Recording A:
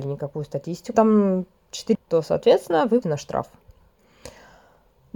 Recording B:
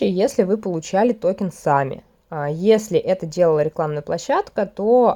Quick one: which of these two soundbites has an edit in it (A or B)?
A